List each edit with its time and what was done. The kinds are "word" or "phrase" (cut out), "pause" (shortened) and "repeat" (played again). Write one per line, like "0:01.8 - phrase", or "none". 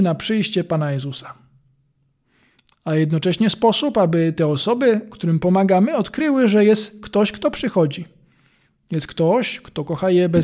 none